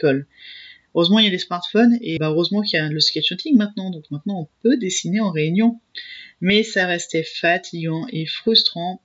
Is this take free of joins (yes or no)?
no